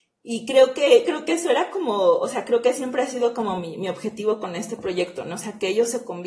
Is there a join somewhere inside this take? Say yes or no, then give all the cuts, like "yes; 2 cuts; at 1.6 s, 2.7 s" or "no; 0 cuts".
no; 0 cuts